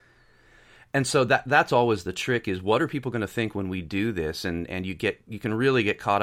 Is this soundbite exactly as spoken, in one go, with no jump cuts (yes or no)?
yes